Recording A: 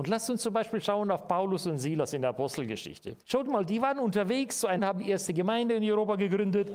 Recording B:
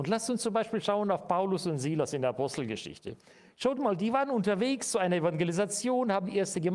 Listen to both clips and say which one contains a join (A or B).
A